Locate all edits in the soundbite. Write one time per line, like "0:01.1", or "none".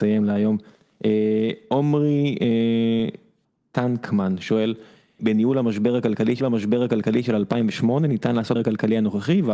0:05.2
0:06.4
0:08.6